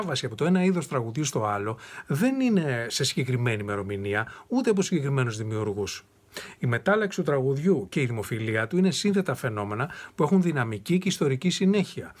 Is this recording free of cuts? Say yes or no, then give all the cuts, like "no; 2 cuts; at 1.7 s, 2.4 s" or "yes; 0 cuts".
yes; 0 cuts